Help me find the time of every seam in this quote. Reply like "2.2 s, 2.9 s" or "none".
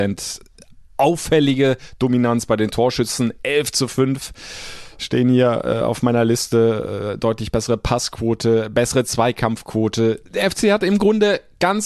10.3 s